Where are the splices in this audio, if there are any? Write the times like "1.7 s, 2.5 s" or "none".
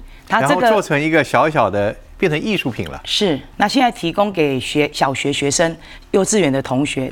3.5 s